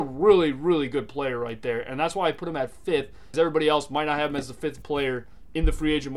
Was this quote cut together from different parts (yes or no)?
yes